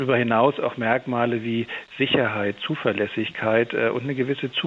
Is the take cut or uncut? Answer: uncut